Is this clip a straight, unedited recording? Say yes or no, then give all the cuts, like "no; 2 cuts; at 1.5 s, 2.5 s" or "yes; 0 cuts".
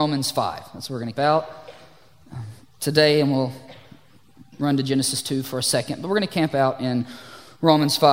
no; 1 cut; at 1.1 s